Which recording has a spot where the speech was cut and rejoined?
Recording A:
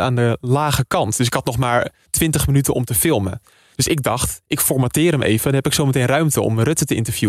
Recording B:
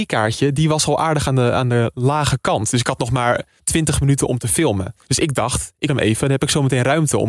B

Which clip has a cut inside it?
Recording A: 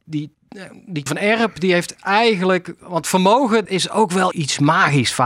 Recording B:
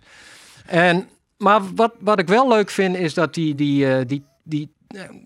A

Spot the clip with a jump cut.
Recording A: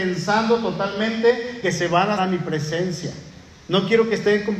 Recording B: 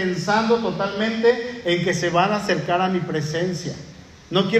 A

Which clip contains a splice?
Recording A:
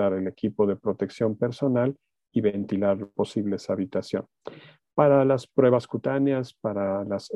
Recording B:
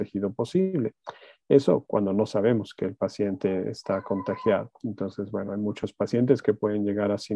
A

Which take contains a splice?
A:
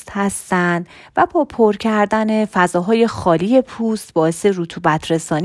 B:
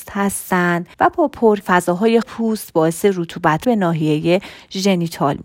B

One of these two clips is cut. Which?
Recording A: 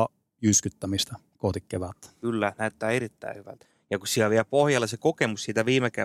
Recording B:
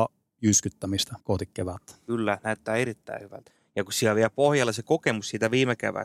B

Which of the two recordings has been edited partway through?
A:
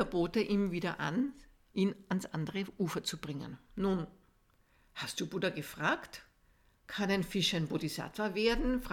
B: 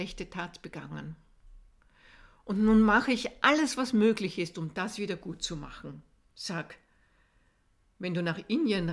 A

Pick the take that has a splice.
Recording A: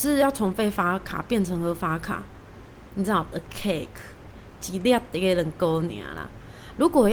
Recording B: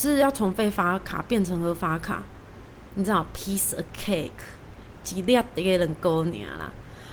A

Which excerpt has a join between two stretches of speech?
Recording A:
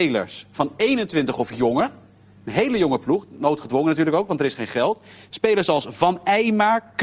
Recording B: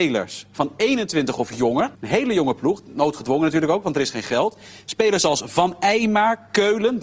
B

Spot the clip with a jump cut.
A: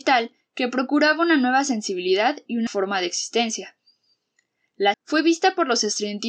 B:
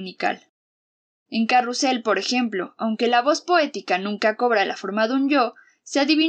A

